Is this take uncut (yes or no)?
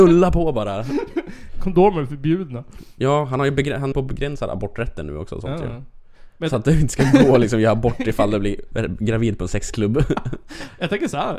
no